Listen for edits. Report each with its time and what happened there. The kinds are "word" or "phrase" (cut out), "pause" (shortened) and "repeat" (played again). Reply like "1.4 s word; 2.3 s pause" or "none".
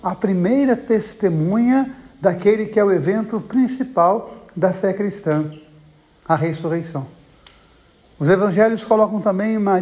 none